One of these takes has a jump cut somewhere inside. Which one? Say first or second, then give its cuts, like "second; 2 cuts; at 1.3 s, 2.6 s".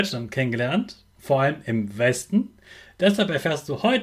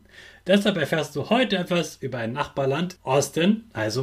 second; 1 cut; at 3.0 s